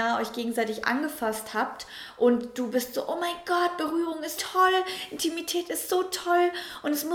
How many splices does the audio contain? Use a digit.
1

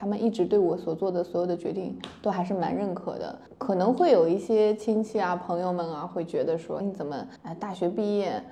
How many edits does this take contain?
2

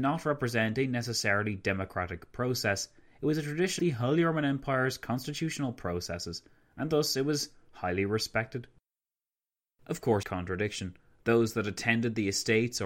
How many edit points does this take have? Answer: 2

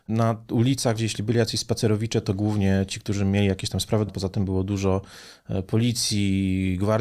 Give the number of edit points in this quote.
2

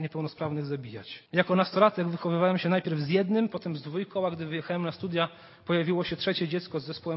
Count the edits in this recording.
1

